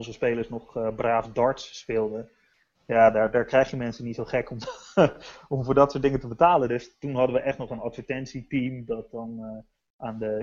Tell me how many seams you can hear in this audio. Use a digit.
0